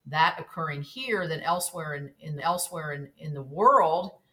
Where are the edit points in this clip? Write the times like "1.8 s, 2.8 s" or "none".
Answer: 2.4 s